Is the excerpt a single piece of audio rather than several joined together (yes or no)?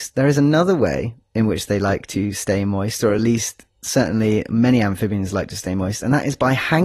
yes